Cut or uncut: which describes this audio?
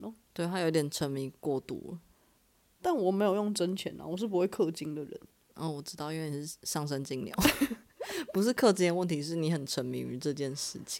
uncut